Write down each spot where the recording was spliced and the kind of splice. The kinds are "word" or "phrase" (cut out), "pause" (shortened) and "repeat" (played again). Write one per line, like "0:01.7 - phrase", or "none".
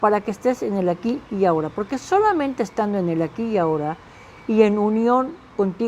none